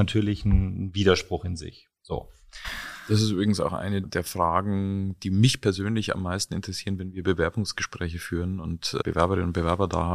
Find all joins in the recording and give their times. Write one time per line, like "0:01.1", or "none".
0:04.0
0:09.0

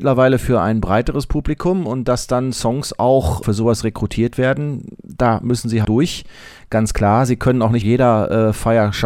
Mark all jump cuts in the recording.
0:03.4
0:05.8
0:07.8

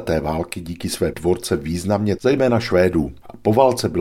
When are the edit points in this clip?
0:01.1
0:02.2

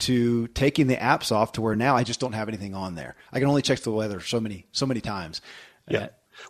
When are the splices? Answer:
none

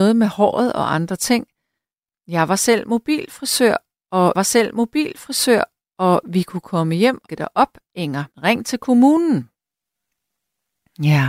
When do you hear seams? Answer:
0:04.3
0:07.3
0:08.3

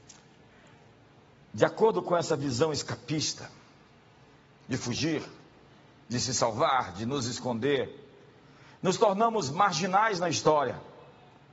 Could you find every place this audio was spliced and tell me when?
none

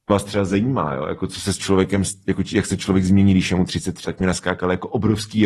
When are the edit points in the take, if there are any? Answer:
0:04.0

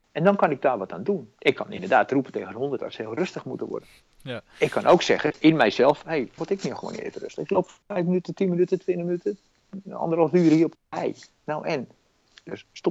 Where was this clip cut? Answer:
0:01.4
0:04.0
0:06.4
0:10.7

